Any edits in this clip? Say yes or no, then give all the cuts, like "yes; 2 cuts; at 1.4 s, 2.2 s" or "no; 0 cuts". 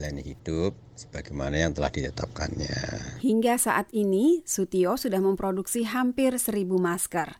no; 0 cuts